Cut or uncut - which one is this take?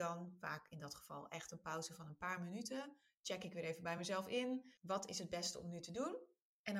uncut